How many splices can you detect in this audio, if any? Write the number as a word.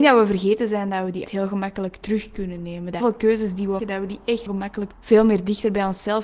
five